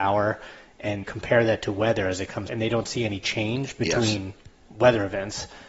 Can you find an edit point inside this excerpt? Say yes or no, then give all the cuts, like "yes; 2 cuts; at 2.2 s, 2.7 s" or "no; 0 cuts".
yes; 2 cuts; at 1.0 s, 2.5 s